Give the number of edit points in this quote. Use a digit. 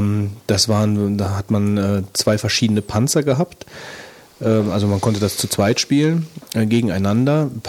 0